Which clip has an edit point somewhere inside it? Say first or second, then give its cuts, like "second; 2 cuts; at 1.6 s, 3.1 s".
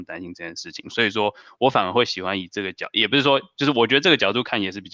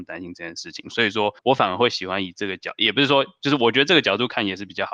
second; 1 cut; at 1.4 s